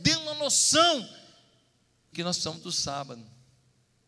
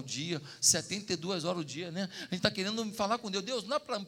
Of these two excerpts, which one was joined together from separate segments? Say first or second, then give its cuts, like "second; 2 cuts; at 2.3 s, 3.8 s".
first; 1 cut; at 2.1 s